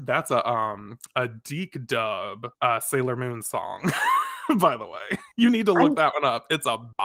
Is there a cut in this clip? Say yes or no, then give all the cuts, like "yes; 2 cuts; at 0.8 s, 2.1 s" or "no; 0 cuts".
no; 0 cuts